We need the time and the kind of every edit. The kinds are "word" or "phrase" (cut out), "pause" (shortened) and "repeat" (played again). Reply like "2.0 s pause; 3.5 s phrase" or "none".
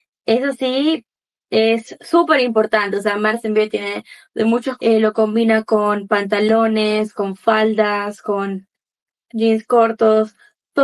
4.8 s word